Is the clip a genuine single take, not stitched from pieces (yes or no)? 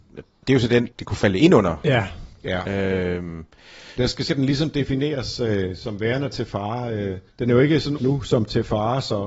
no